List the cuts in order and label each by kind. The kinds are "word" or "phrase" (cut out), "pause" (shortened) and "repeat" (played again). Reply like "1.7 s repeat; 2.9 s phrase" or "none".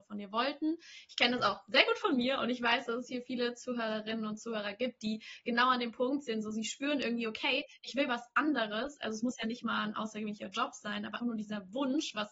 11.2 s word